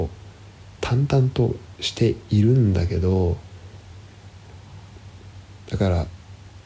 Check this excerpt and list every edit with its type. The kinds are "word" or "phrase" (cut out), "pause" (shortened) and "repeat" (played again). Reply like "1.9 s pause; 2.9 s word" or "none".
none